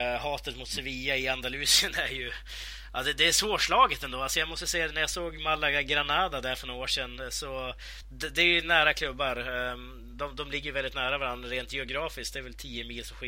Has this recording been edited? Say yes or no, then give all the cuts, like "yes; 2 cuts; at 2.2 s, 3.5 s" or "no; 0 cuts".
no; 0 cuts